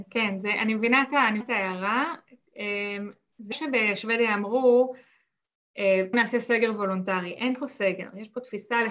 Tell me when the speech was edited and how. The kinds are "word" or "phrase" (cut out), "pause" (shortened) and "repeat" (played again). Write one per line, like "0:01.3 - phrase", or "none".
0:01.4 - word
0:03.5 - word
0:06.1 - word